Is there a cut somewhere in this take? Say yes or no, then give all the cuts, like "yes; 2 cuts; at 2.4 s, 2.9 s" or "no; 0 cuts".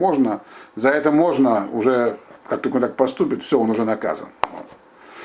no; 0 cuts